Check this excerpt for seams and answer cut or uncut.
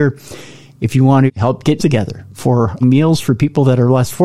cut